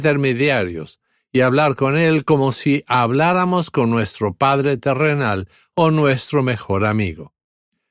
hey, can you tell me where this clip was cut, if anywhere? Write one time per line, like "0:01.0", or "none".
none

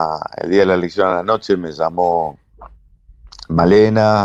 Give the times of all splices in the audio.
none

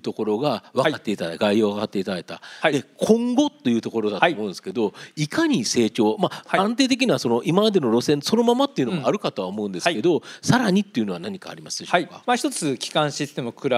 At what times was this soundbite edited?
none

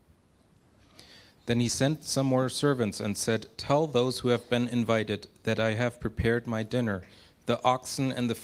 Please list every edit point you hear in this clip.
none

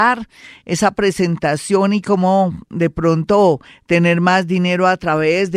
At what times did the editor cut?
none

